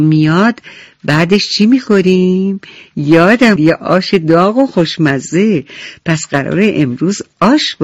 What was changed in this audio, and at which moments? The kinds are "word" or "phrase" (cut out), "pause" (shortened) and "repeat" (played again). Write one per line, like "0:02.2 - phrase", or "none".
0:03.6 - word